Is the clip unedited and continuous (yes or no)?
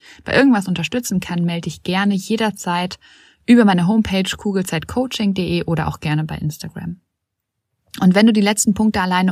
yes